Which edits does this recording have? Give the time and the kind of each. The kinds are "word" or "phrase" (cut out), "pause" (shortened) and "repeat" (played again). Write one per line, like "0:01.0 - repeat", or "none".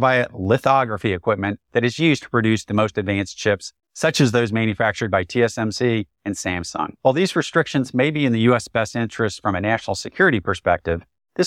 0:01.6 - pause